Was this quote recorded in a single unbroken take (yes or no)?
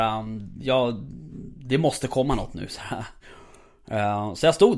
yes